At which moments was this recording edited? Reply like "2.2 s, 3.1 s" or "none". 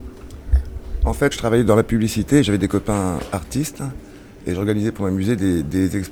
1.3 s